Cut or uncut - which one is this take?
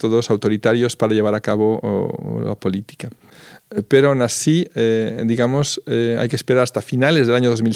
uncut